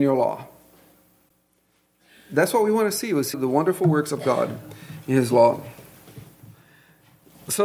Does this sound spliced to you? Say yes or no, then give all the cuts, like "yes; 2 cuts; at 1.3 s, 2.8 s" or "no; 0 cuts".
yes; 1 cut; at 3.3 s